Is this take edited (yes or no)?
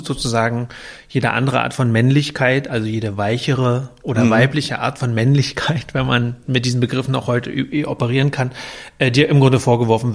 no